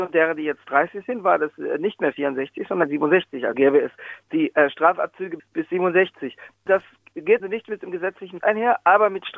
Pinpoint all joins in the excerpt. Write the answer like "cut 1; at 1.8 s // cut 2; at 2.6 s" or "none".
cut 1; at 3.5 s // cut 2; at 5.4 s // cut 3; at 7.4 s // cut 4; at 8.4 s